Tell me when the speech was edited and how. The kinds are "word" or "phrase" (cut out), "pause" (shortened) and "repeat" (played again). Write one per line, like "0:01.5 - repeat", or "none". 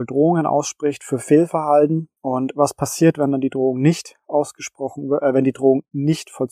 0:02.2 - pause